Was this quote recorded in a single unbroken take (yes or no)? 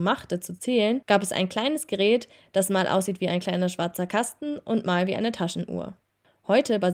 yes